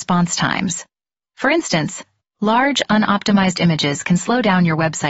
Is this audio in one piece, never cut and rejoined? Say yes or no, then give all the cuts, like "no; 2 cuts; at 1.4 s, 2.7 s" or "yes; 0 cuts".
yes; 0 cuts